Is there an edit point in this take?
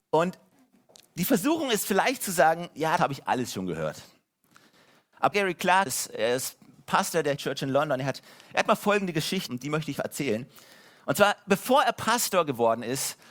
yes; 6 cuts; at 3.0 s, 5.3 s, 5.9 s, 7.4 s, 9.5 s, 9.9 s

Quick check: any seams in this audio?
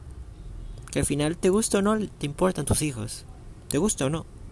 no; 0 cuts

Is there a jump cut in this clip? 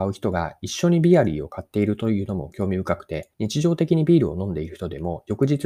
yes; 1 cut; at 3.3 s

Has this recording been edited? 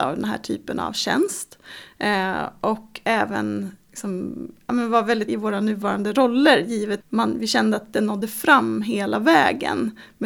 yes; 3 cuts; at 5.3 s, 7.0 s, 7.9 s

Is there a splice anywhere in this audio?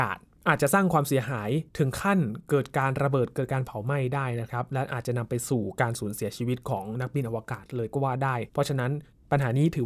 yes; 1 cut; at 8.5 s

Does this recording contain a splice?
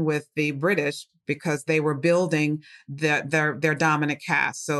no; 0 cuts

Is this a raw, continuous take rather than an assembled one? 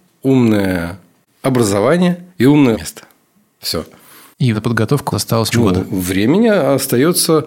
no; 5 cuts; at 2.3 s, 2.7 s, 4.5 s, 5.1 s, 5.5 s

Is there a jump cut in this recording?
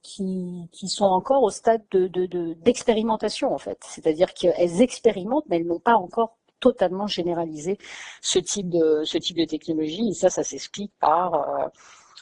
yes; 1 cut; at 1.9 s

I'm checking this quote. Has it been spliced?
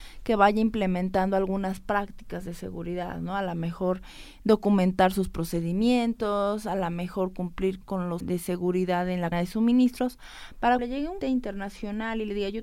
yes; 5 cuts; at 7.8 s, 8.2 s, 9.3 s, 10.8 s, 11.2 s

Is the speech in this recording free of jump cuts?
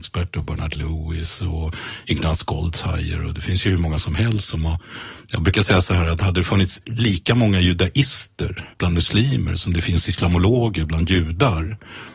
no; 1 cut; at 8.7 s

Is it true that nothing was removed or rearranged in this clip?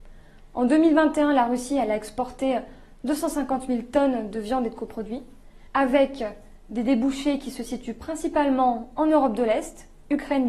no; 1 cut; at 5.7 s

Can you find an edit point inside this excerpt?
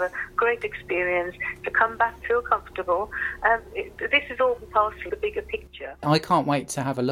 yes; 4 cuts; at 2.2 s, 3.7 s, 4.6 s, 5.1 s

